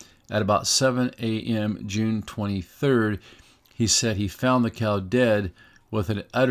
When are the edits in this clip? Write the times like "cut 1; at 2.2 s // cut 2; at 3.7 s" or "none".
none